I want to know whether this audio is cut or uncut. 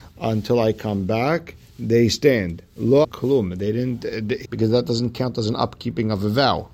cut